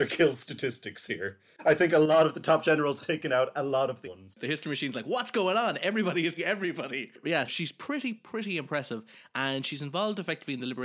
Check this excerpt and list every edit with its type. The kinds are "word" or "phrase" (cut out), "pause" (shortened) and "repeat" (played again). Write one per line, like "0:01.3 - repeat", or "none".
0:03.0 - word
0:04.0 - word
0:06.4 - word
0:07.5 - word
0:08.2 - word